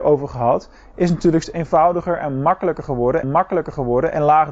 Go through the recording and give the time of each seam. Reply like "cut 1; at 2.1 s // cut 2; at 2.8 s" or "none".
cut 1; at 1.4 s // cut 2; at 3.2 s

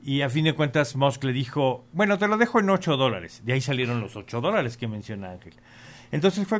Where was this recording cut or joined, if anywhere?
none

